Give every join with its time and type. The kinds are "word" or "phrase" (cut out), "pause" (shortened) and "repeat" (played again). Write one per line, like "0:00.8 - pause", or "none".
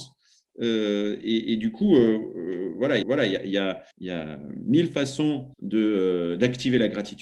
0:03.0 - repeat
0:03.9 - pause
0:05.5 - pause

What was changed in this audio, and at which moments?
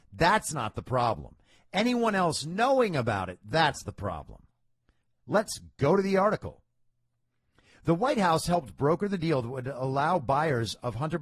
none

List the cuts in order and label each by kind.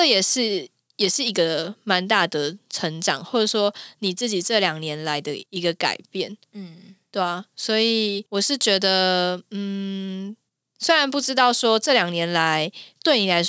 0:05.5 - pause
0:08.3 - pause
0:10.5 - pause

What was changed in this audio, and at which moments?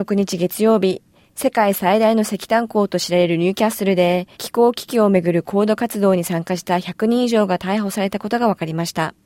0:04.3 - pause

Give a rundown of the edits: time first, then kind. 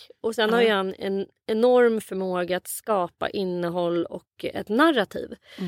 none

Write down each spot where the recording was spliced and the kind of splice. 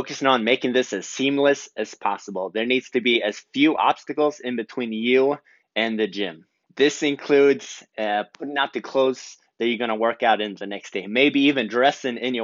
0:06.6 - pause

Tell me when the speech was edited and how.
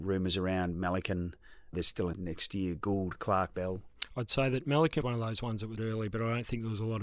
0:01.7 - word
0:02.1 - word
0:03.5 - word
0:05.0 - word
0:05.8 - word

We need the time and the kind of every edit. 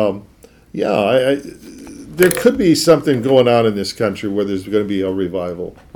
none

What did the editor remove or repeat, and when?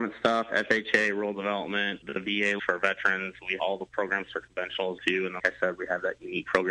0:02.0 - word
0:02.6 - word
0:03.6 - word
0:05.0 - word
0:05.4 - word

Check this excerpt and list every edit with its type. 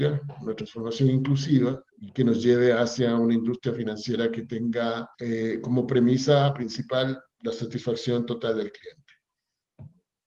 0:01.9 - pause
0:05.1 - pause

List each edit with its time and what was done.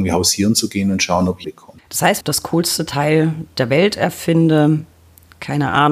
0:01.4 - word
0:01.8 - pause
0:02.2 - phrase

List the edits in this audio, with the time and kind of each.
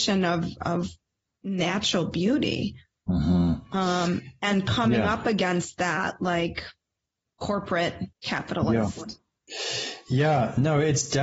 0:08.1 - pause

